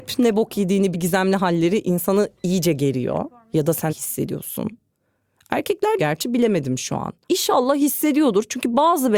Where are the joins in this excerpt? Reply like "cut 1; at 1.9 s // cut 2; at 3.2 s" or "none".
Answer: cut 1; at 0.9 s // cut 2; at 3.9 s // cut 3; at 6.0 s // cut 4; at 7.2 s